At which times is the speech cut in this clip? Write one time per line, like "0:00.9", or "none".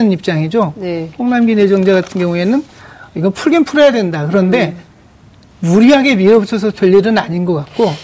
none